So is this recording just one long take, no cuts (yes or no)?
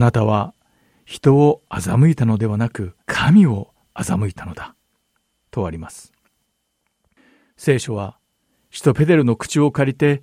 no